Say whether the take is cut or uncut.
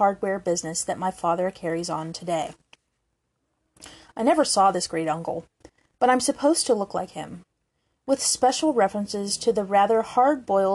uncut